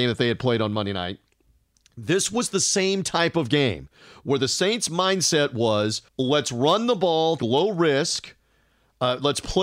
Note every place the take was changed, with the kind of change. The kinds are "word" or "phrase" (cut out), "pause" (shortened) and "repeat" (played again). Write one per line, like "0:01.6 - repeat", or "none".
0:06.1 - pause
0:07.4 - word